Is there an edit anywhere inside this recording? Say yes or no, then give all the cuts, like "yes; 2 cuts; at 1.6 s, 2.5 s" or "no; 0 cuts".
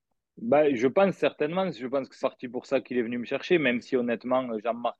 yes; 1 cut; at 2.2 s